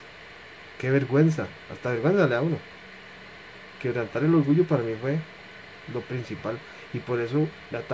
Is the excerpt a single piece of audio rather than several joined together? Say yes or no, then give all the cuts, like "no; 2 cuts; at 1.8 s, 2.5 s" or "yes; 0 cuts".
yes; 0 cuts